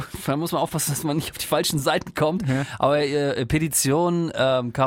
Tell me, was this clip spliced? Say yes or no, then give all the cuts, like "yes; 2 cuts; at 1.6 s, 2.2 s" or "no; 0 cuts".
no; 0 cuts